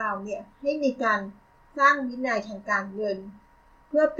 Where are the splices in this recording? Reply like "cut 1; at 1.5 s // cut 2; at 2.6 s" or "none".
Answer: none